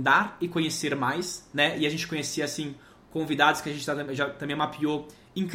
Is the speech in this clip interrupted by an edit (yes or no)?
no